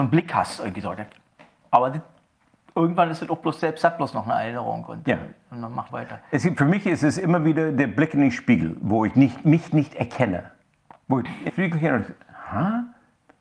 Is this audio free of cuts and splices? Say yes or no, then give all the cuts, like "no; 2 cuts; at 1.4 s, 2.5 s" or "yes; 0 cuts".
no; 3 cuts; at 1.6 s, 5.9 s, 11.5 s